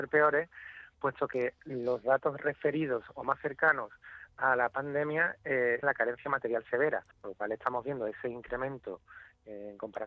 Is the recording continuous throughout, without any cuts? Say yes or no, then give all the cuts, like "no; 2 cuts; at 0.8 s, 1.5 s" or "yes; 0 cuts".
no; 2 cuts; at 5.8 s, 7.1 s